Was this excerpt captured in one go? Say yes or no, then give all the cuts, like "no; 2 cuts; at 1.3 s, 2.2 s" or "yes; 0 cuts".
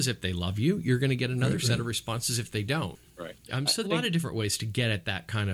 no; 2 cuts; at 3.4 s, 3.8 s